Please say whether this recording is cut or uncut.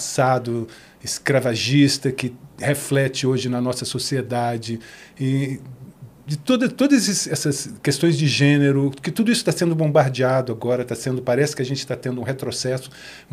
uncut